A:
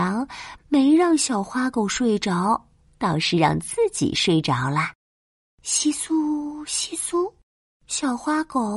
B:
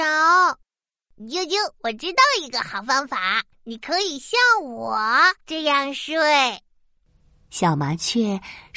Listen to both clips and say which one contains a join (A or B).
B